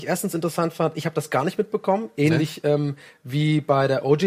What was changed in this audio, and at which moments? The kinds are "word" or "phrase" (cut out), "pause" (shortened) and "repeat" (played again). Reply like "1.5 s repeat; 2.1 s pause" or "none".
none